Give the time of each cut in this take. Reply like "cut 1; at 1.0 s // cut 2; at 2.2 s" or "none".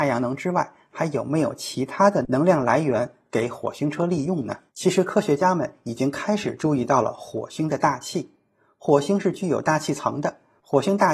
cut 1; at 4.7 s